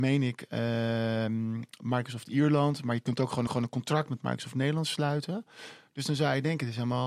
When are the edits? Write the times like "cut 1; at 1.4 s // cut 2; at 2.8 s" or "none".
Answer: cut 1; at 3.5 s